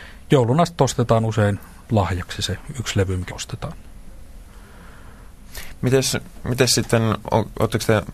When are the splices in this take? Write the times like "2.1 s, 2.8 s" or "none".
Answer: 3.3 s